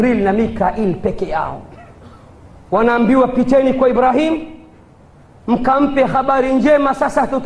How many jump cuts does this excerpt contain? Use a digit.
0